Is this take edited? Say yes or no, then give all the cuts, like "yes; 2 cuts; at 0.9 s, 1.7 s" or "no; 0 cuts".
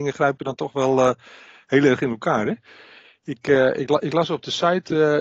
no; 0 cuts